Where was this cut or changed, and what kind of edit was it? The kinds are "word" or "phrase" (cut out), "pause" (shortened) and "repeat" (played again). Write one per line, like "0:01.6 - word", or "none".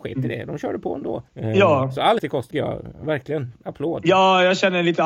0:01.3 - pause
0:02.2 - word
0:02.5 - word